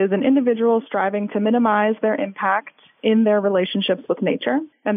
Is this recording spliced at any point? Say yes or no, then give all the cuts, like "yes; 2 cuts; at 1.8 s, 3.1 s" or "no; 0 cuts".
no; 0 cuts